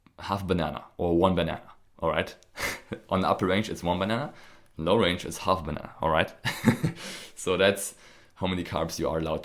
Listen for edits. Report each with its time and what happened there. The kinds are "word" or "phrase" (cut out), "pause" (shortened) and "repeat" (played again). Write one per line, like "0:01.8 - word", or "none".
none